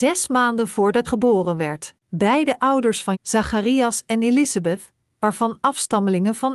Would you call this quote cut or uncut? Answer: cut